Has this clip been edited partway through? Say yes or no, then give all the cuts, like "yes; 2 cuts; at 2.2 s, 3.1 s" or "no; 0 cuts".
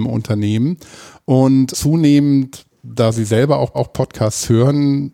yes; 2 cuts; at 1.7 s, 3.7 s